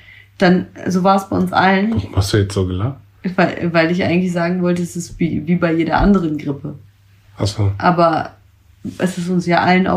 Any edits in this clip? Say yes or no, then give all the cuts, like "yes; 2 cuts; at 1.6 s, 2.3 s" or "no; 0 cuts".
no; 0 cuts